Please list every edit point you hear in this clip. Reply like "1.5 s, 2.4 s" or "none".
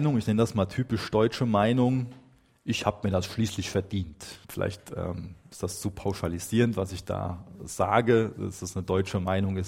4.4 s